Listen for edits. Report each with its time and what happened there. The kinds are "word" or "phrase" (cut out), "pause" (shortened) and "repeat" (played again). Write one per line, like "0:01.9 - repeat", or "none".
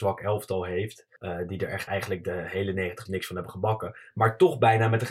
0:01.2 - pause
0:01.9 - word
0:03.1 - word